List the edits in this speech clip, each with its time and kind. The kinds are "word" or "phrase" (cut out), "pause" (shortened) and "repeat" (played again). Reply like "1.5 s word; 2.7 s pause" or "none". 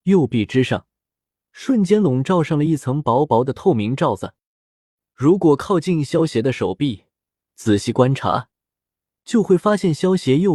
none